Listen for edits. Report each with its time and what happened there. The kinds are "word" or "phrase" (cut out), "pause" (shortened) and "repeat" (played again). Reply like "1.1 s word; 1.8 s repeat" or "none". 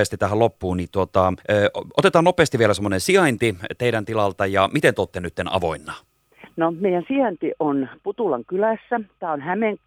1.4 s pause